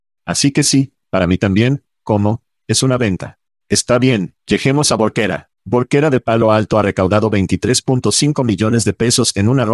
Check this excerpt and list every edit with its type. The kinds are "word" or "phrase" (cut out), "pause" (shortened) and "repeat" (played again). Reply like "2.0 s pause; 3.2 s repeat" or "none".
4.4 s pause; 5.5 s pause